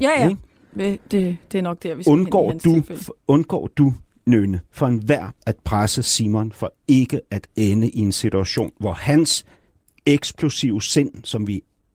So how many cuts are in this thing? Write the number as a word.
one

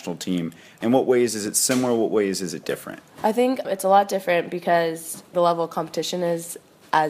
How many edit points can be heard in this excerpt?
three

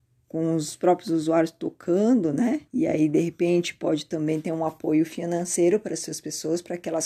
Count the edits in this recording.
one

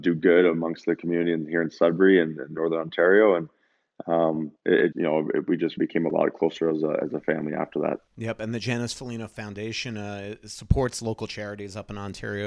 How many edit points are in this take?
four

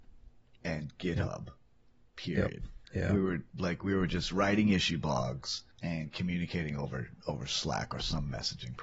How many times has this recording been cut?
two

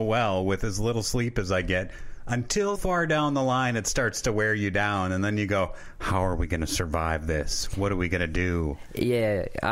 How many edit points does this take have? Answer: one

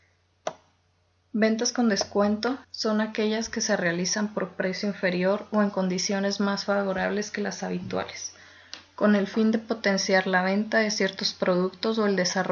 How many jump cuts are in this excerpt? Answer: one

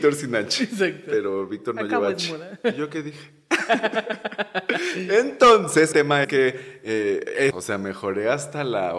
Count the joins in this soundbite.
three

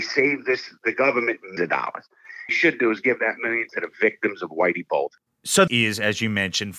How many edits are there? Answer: four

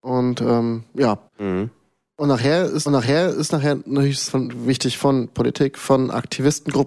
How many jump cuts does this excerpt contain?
three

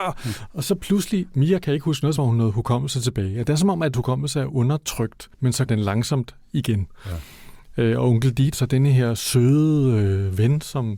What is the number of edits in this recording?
five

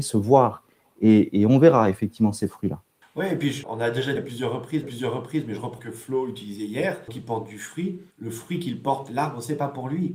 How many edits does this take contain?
seven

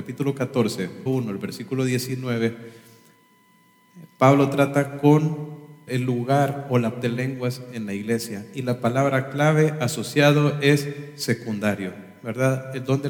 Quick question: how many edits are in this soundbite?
three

